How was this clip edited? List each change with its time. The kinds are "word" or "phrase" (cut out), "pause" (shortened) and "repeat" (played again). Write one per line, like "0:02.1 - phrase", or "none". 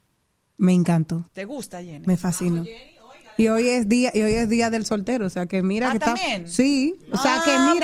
0:01.3 - pause